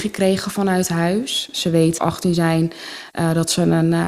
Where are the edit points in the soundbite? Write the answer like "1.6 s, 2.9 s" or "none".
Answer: 2.0 s